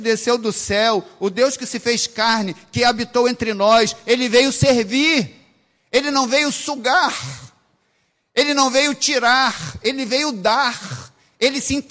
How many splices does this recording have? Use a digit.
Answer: 0